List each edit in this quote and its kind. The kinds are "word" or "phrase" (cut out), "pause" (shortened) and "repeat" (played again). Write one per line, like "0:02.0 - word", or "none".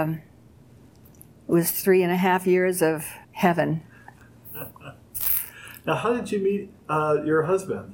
0:03.2 - pause
0:06.8 - pause